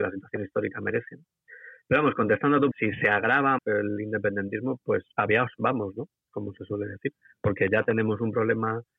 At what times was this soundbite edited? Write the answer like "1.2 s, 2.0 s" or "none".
2.7 s, 3.6 s, 5.1 s